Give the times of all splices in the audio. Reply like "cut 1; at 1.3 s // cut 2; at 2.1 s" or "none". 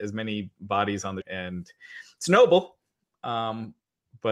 cut 1; at 1.2 s